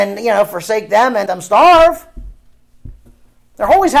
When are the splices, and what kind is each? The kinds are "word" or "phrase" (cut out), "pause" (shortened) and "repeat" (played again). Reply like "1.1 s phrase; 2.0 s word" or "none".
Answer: 1.3 s word